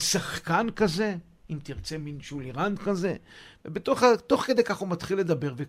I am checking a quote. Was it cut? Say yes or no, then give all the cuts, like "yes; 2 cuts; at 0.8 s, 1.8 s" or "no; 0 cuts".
no; 0 cuts